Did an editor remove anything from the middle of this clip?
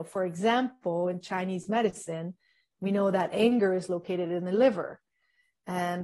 no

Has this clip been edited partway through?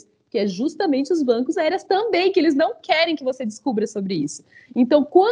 yes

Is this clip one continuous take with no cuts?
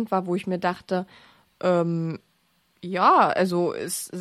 yes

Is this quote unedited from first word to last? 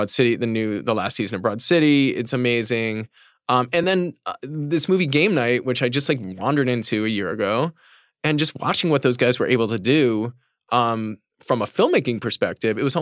yes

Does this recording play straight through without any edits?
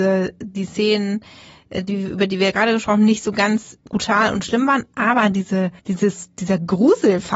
no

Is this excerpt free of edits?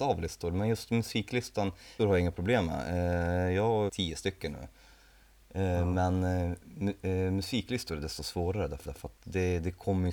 no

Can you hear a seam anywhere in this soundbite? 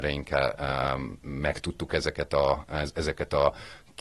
no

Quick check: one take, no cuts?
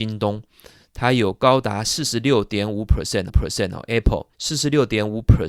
no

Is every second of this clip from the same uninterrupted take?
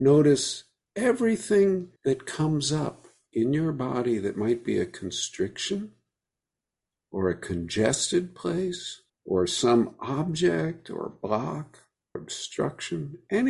no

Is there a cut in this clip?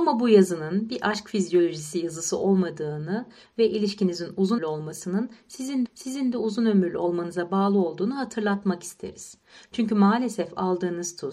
yes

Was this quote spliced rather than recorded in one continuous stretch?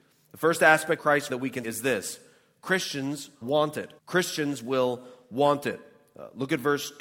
yes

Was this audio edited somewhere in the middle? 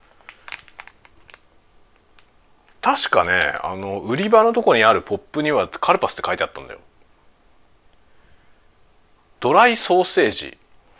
no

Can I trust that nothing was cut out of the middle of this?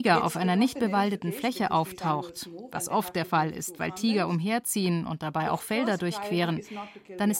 yes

